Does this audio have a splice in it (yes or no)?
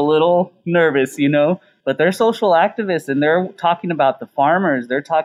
no